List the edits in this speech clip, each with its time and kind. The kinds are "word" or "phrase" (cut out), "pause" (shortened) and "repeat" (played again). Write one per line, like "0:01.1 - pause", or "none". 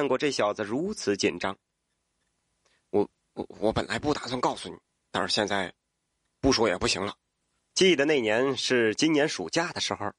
0:04.8 - pause
0:07.4 - pause